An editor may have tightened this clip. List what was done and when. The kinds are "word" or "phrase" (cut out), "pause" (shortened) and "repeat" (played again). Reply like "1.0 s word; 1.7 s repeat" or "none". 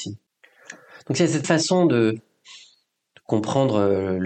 1.4 s word